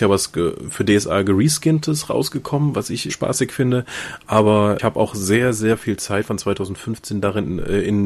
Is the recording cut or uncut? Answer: cut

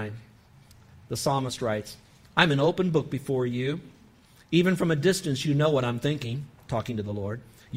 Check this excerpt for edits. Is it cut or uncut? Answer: uncut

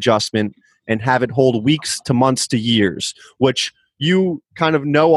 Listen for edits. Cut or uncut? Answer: uncut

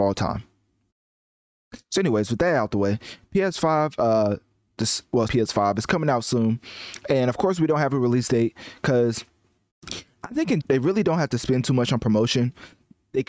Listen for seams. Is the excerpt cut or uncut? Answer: cut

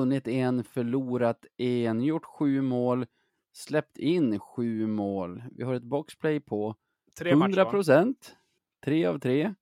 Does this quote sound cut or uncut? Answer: uncut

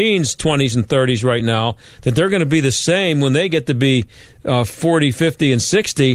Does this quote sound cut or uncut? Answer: uncut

